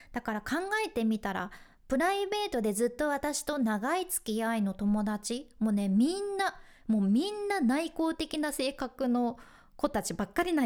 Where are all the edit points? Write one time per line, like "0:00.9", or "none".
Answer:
none